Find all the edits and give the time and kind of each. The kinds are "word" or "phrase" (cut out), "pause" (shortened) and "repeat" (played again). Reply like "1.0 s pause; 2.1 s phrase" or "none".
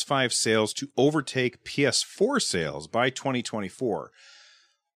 none